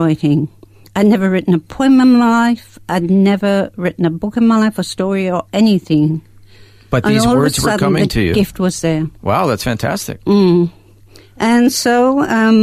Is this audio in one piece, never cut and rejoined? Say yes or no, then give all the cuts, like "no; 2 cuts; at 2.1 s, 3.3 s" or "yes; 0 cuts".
no; 1 cut; at 9.2 s